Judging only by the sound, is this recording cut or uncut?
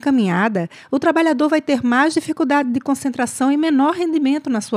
uncut